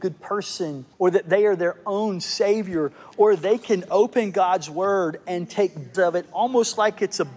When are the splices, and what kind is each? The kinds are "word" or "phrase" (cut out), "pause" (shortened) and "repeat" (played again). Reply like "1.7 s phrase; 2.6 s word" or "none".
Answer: 0.9 s pause; 5.9 s phrase